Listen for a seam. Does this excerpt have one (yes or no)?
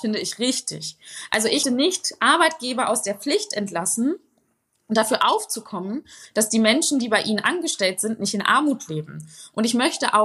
yes